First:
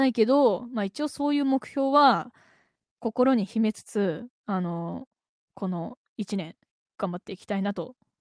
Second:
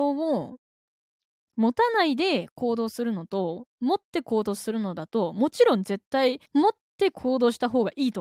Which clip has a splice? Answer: second; 2 cuts; at 4.0 s, 6.5 s

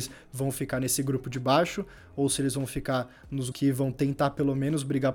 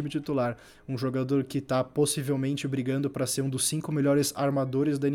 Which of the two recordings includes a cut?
first; 1 cut; at 3.5 s

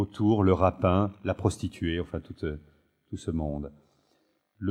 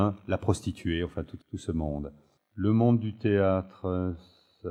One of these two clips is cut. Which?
second; 2 cuts; at 1.4 s, 2.4 s

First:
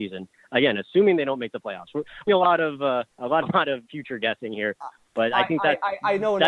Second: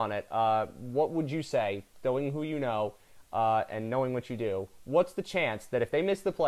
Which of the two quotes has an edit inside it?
first; 4 cuts; at 2.3 s, 3.1 s, 3.4 s, 3.8 s

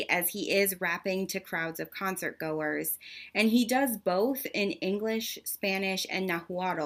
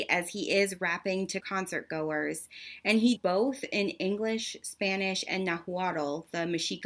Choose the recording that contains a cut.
second; 2 cuts; at 1.4 s, 3.2 s

